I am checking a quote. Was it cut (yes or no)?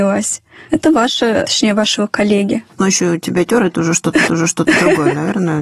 yes